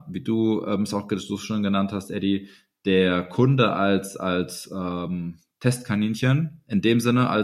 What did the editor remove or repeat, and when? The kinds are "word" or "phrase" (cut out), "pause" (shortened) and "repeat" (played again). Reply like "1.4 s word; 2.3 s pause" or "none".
none